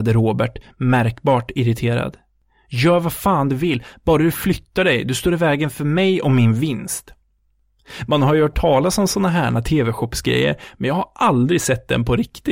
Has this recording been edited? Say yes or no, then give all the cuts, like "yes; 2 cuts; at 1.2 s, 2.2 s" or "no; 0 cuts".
no; 0 cuts